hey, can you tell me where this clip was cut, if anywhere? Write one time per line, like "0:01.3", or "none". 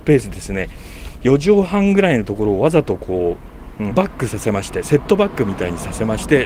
0:03.9